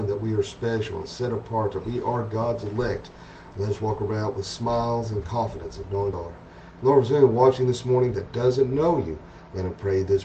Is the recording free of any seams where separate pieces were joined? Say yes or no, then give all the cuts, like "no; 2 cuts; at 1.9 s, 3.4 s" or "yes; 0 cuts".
no; 1 cut; at 6.1 s